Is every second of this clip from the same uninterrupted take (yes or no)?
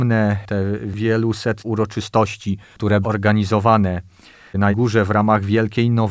no